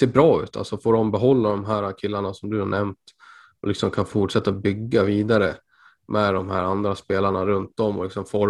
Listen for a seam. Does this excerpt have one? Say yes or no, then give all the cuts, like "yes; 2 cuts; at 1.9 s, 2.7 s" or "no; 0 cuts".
no; 0 cuts